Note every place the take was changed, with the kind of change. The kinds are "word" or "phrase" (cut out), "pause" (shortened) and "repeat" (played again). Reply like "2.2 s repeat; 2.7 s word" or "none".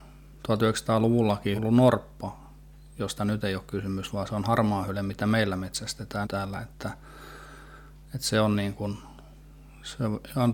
1.6 s phrase; 6.2 s word